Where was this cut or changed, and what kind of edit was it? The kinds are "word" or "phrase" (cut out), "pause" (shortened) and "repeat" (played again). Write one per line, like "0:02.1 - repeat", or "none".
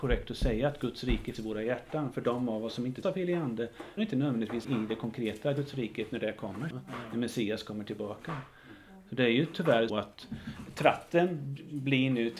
0:01.3 - word
0:03.0 - word
0:04.0 - word
0:04.6 - word
0:06.7 - word
0:09.9 - word